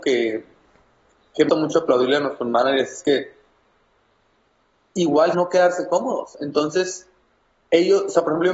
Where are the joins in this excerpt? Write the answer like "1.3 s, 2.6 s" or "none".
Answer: 1.5 s, 5.3 s